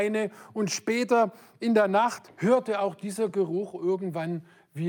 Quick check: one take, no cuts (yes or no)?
yes